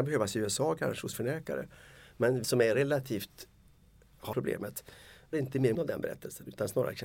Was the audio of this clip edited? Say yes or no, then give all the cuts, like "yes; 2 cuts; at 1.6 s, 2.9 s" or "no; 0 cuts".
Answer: yes; 5 cuts; at 1.1 s, 2.4 s, 4.3 s, 5.3 s, 5.7 s